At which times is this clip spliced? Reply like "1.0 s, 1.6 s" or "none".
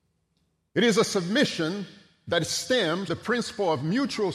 3.1 s